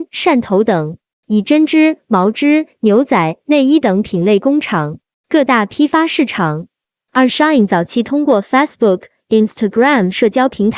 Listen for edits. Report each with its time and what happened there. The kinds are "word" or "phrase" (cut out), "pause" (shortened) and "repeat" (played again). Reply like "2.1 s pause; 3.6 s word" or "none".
none